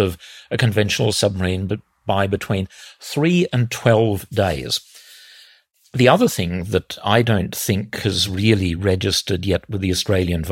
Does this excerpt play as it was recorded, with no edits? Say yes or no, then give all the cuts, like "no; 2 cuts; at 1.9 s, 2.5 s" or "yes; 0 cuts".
yes; 0 cuts